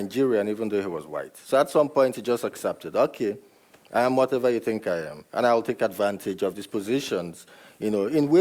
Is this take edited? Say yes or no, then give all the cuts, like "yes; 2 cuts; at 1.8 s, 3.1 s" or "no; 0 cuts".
no; 0 cuts